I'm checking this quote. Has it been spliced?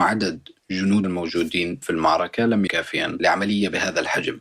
yes; 3 cuts; at 1.0 s, 1.8 s, 2.7 s

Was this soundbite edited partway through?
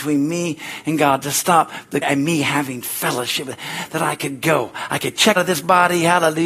yes; 2 cuts; at 2.0 s, 5.4 s

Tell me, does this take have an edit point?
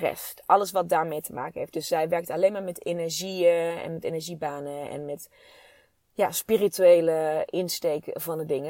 no; 0 cuts

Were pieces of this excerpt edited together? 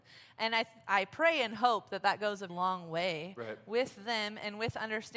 yes; 1 cut; at 2.5 s

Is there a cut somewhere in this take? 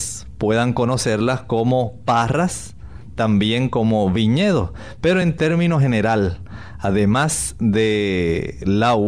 no; 0 cuts

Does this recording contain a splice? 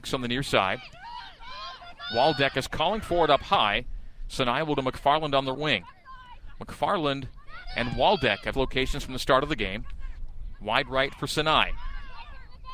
yes; 3 cuts; at 4.8 s, 5.5 s, 8.5 s

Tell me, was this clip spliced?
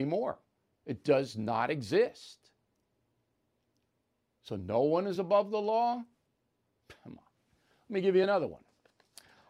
no; 0 cuts

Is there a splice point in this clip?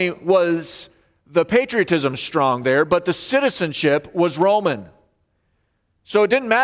no; 0 cuts

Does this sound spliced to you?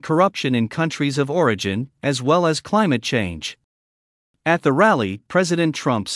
no; 0 cuts

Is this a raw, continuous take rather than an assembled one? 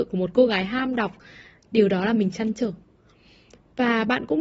yes; 0 cuts

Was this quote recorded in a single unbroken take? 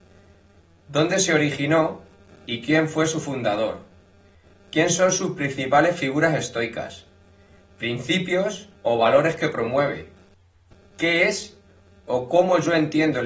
no; 1 cut; at 8.8 s

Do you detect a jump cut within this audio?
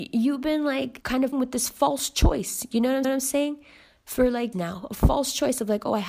yes; 4 cuts; at 1.0 s, 1.3 s, 3.0 s, 4.5 s

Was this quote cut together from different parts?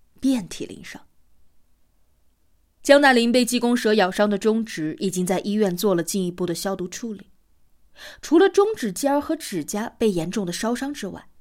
no; 0 cuts

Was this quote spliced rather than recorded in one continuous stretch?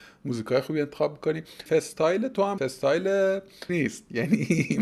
yes; 3 cuts; at 1.7 s, 2.6 s, 3.7 s

